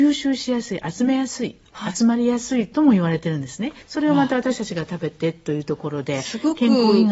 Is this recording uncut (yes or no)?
no